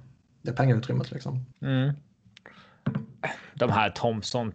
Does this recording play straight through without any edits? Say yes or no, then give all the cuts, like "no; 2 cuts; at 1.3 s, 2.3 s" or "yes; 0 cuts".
no; 1 cut; at 1.5 s